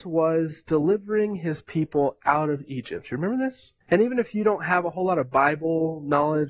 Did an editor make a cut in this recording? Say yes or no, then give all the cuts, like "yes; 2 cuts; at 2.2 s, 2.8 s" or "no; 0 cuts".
yes; 1 cut; at 3.8 s